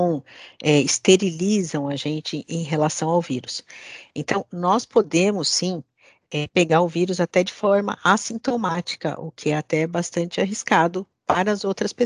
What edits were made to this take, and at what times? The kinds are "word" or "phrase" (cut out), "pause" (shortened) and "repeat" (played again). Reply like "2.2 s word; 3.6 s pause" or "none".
none